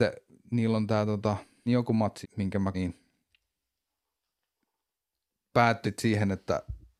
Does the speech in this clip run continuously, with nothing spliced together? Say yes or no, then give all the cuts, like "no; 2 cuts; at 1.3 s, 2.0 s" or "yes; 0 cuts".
no; 4 cuts; at 1.7 s, 2.2 s, 2.7 s, 5.8 s